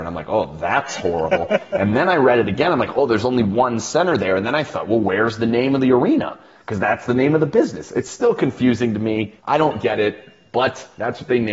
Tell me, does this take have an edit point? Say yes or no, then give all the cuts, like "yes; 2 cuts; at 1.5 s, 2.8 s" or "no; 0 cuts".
yes; 1 cut; at 9.4 s